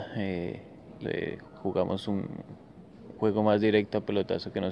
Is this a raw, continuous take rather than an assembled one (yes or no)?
no